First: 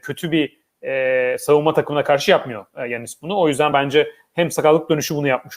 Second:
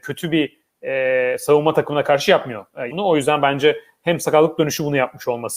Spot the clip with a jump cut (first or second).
second